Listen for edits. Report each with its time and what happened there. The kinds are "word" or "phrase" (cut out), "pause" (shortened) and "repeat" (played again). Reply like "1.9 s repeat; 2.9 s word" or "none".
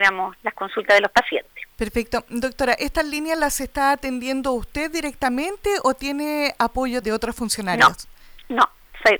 1.7 s pause; 7.0 s phrase